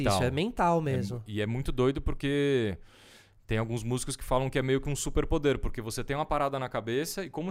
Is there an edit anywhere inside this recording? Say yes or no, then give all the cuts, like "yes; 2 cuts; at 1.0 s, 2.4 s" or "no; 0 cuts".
no; 0 cuts